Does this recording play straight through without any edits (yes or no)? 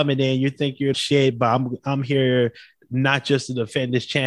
no